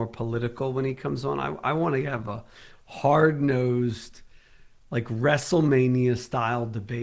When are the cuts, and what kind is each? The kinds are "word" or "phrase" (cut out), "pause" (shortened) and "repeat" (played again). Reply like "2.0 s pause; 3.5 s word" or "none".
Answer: none